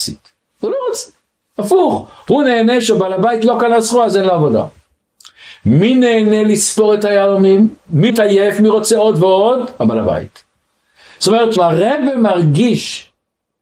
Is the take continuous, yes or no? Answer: no